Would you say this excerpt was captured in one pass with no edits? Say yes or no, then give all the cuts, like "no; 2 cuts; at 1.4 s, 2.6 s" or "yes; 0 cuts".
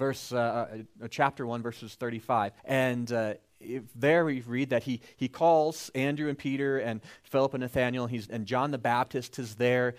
no; 2 cuts; at 2.6 s, 8.3 s